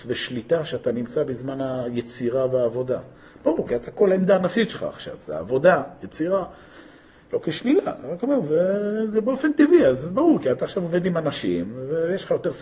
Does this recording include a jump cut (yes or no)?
no